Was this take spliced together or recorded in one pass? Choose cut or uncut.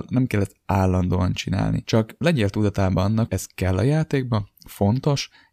cut